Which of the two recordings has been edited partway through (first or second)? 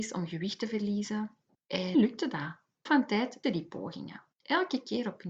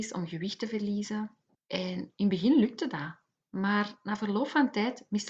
first